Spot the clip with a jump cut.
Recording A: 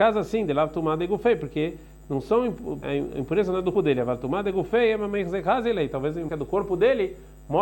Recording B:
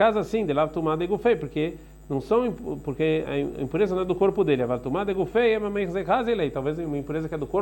A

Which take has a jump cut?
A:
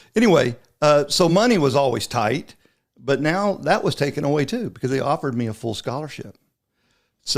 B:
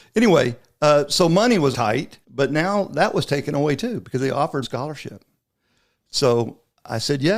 B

